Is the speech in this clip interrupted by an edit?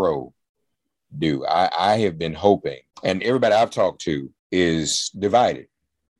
yes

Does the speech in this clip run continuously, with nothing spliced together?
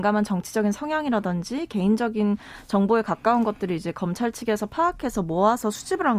yes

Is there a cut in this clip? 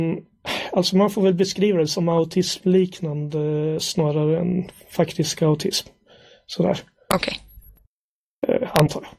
no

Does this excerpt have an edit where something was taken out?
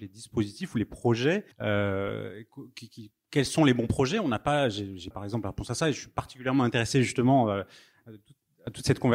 yes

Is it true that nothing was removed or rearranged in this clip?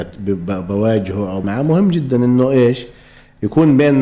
no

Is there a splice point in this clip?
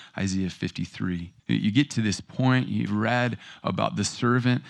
yes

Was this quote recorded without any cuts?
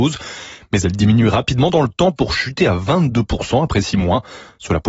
yes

